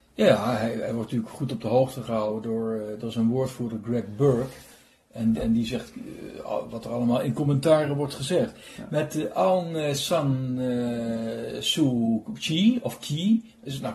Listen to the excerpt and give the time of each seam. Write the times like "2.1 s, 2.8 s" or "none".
none